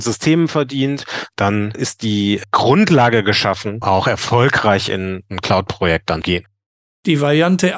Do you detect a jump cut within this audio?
yes; 2 cuts; at 3.8 s, 6.2 s

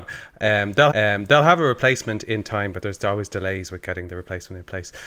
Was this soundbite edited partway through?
yes; 2 cuts; at 0.9 s, 2.8 s

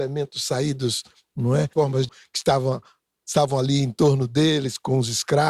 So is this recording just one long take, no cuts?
no; 2 cuts; at 1.7 s, 2.1 s

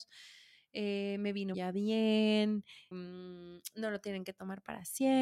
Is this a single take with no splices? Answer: no; 2 cuts; at 1.5 s, 2.9 s

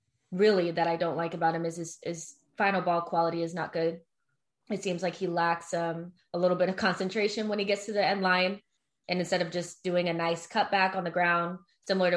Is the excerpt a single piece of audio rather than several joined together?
yes; 0 cuts

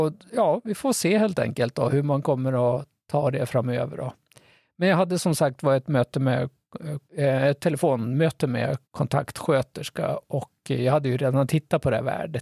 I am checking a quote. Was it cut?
yes; 2 cuts; at 7.1 s, 8.8 s

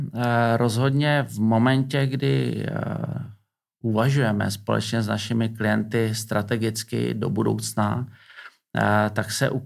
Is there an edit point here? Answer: no; 0 cuts

